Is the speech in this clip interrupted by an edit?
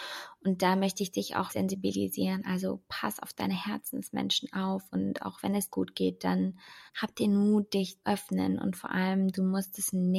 yes; 4 cuts; at 1.5 s, 5.7 s, 6.9 s, 8.0 s

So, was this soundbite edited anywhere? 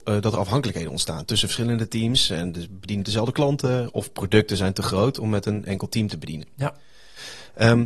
no; 0 cuts

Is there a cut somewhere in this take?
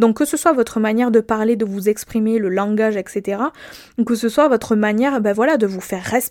no; 0 cuts

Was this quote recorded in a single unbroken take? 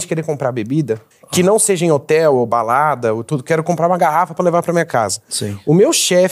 no; 1 cut; at 1.1 s

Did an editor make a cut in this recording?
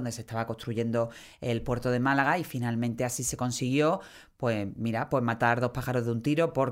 no; 0 cuts

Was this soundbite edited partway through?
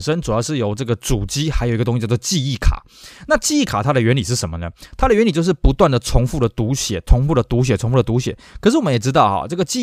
no; 0 cuts

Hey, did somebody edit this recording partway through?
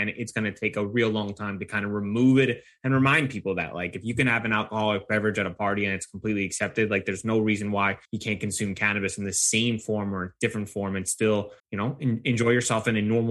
yes; 2 cuts; at 8.1 s, 11.6 s

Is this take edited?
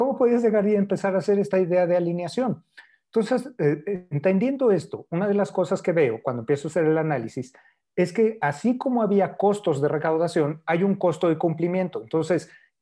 no; 0 cuts

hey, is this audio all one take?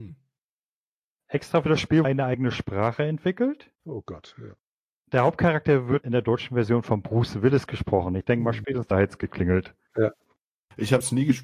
no; 3 cuts; at 2.0 s, 3.7 s, 6.0 s

